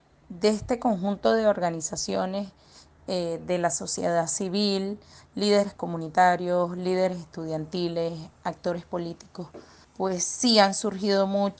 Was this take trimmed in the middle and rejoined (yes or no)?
no